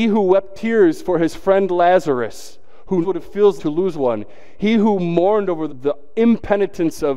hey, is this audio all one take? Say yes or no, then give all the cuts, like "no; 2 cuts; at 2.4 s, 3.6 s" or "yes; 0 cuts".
no; 4 cuts; at 3.0 s, 3.6 s, 3.9 s, 5.7 s